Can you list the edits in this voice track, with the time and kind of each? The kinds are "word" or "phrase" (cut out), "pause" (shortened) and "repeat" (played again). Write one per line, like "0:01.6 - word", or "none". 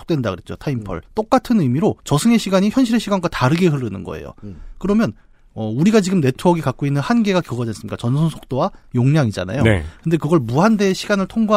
0:01.1 - pause
0:02.0 - pause